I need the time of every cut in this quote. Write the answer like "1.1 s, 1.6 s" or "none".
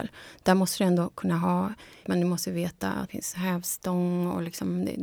2.0 s, 3.1 s